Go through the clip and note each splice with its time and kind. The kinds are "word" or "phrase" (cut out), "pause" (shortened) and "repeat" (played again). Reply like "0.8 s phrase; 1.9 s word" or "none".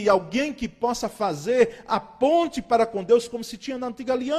none